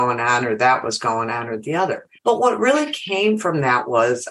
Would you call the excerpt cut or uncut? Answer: cut